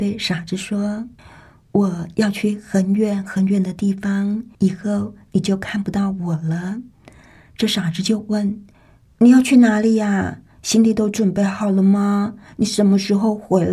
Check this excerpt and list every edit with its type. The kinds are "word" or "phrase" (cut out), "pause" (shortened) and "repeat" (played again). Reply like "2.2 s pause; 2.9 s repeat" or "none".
1.2 s pause; 4.5 s pause; 6.9 s pause; 8.7 s pause